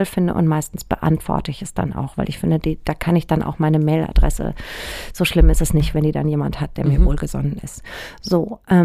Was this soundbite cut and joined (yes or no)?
no